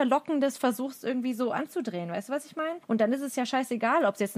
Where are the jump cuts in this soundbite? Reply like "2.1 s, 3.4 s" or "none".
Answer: 2.8 s